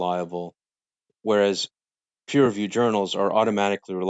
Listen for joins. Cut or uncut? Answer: uncut